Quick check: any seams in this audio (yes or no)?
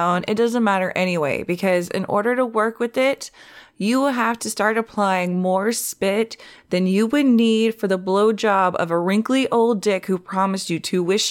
no